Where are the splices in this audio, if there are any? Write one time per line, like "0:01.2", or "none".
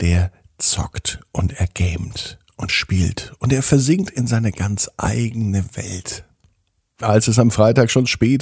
0:02.7